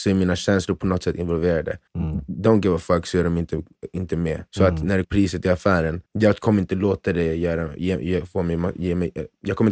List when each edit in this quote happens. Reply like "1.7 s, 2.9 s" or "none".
1.9 s, 4.5 s, 5.0 s, 6.1 s

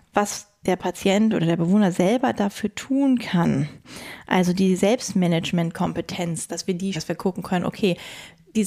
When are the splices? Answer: 6.9 s

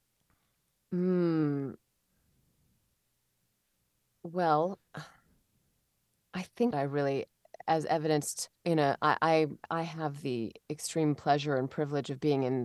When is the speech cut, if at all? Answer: 4.9 s, 6.7 s, 8.5 s

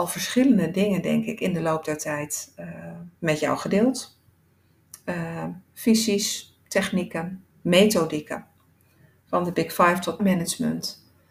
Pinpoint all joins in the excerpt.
3.2 s, 7.5 s, 10.2 s

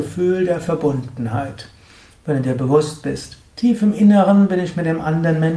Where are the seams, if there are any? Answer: none

